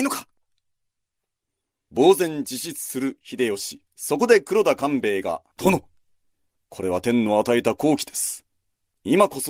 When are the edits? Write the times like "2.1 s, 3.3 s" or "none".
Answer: 3.9 s, 5.5 s